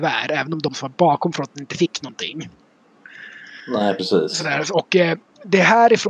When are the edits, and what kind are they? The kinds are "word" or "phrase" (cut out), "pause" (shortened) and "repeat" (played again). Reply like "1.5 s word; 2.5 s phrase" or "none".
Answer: none